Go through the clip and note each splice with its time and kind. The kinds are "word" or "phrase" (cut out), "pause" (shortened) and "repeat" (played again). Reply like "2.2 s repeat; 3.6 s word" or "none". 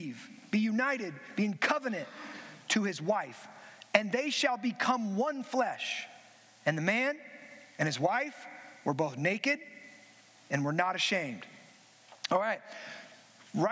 none